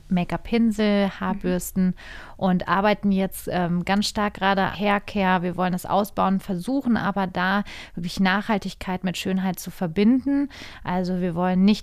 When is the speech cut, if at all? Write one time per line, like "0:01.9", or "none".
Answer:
0:04.7